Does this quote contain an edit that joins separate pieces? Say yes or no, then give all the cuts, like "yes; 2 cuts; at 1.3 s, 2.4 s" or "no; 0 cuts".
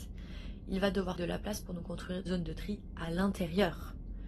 yes; 2 cuts; at 1.2 s, 2.3 s